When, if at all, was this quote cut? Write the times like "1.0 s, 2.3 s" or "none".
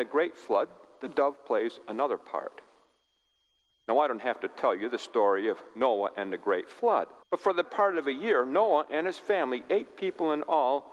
7.2 s, 7.6 s